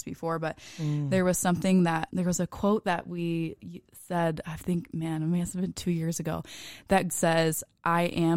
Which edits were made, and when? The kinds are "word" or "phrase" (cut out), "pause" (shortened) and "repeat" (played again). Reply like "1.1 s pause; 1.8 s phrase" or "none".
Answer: 2.1 s word; 7.1 s word